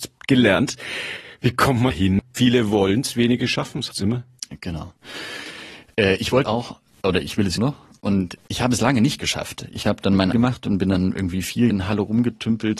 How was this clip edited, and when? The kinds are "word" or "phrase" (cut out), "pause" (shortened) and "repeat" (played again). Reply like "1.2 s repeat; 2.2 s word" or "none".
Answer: 1.9 s word; 3.9 s word; 6.4 s word; 7.6 s word; 8.4 s word; 10.3 s word; 11.7 s word